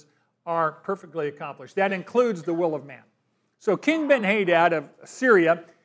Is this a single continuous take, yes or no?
yes